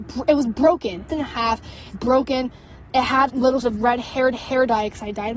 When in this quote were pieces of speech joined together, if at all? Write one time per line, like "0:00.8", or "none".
0:01.1
0:01.9
0:03.3
0:03.6
0:04.3

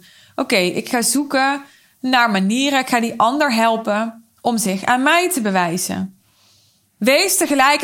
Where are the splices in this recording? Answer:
none

